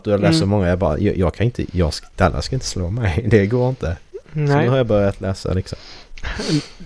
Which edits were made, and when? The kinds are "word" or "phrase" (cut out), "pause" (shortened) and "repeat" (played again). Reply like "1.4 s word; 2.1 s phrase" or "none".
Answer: 4.2 s pause